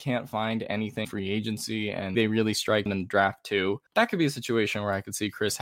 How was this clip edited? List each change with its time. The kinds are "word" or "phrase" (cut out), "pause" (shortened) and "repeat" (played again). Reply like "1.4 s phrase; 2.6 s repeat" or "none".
1.0 s word; 2.1 s word; 2.9 s word; 3.9 s pause